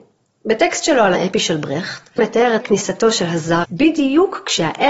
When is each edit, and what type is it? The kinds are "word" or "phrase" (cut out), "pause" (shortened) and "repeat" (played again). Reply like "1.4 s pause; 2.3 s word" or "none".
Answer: 1.1 s word; 2.2 s word; 2.6 s word; 3.6 s word